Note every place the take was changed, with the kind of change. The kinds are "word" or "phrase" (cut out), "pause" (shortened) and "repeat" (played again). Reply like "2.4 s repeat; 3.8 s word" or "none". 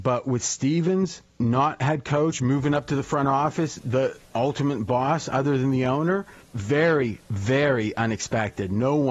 1.3 s pause; 6.4 s pause